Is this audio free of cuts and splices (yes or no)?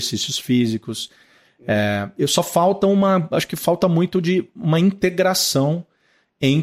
yes